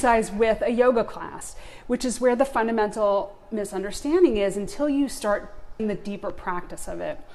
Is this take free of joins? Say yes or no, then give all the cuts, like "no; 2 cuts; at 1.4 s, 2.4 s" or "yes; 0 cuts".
no; 1 cut; at 5.8 s